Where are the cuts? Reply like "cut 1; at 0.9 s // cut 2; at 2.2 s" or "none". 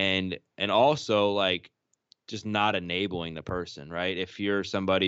none